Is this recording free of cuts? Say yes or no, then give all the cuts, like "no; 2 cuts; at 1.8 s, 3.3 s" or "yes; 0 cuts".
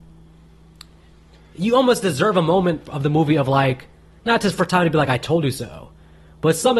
yes; 0 cuts